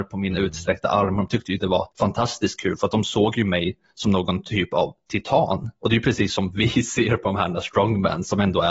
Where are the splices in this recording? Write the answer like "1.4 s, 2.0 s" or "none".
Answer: 1.9 s